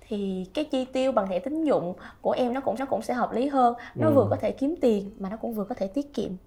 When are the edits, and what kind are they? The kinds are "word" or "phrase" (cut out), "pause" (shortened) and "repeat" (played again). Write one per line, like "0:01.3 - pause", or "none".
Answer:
0:02.8 - repeat